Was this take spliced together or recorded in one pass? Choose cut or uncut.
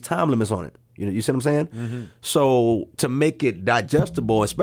cut